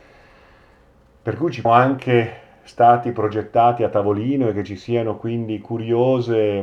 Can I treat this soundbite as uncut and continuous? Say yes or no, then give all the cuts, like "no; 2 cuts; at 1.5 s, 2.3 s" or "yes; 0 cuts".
no; 1 cut; at 1.6 s